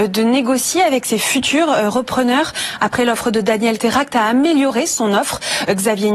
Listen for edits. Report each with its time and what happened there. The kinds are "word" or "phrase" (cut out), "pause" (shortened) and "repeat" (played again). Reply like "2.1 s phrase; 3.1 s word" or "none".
3.8 s word